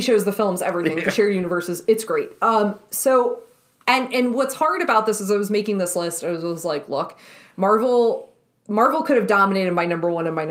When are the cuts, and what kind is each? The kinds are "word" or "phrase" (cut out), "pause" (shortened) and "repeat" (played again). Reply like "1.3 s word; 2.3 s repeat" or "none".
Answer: none